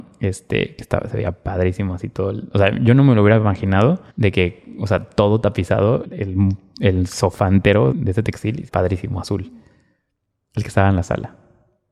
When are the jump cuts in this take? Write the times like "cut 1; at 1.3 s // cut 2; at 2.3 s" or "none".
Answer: cut 1; at 4.1 s // cut 2; at 6.0 s // cut 3; at 7.9 s // cut 4; at 8.7 s